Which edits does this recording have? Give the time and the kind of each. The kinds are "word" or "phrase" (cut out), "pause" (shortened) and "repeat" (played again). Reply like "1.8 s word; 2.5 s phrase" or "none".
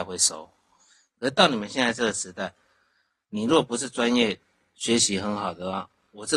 none